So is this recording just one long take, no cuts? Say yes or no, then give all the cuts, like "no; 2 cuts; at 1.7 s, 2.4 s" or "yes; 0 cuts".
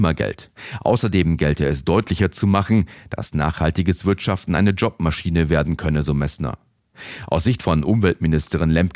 yes; 0 cuts